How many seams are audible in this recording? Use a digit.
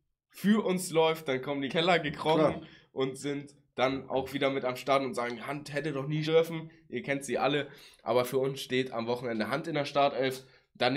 2